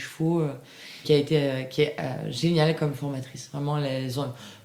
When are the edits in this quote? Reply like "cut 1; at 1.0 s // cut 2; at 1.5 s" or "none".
cut 1; at 1.0 s